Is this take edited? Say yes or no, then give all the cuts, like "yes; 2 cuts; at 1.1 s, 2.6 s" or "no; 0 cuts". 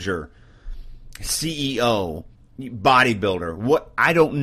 yes; 1 cut; at 2.3 s